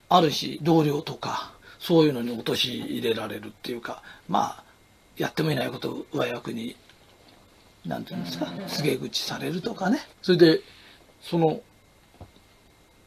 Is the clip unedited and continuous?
no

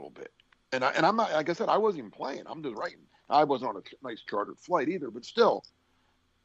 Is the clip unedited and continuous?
yes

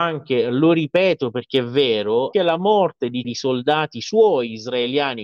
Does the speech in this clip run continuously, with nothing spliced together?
no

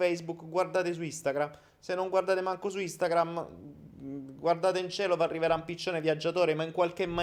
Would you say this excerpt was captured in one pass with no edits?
yes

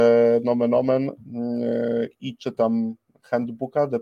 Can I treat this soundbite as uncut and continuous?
yes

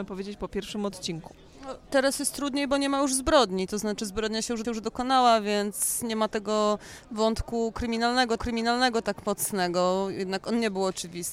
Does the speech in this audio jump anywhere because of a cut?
yes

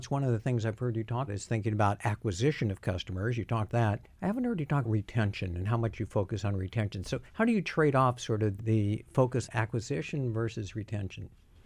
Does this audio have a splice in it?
yes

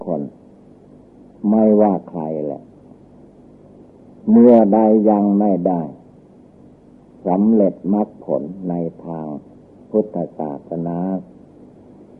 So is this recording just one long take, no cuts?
yes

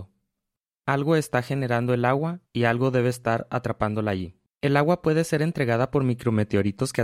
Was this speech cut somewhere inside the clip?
yes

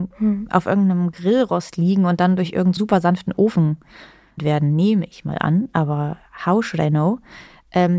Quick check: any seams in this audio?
yes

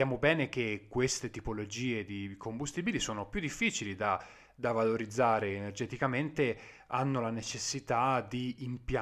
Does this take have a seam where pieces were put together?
no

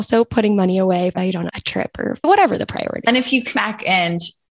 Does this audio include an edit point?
yes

